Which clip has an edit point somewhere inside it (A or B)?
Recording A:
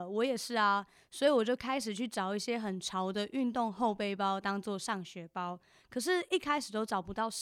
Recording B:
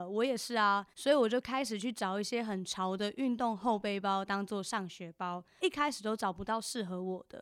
B